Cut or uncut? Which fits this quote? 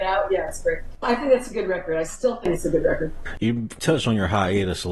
cut